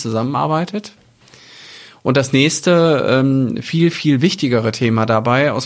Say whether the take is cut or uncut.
uncut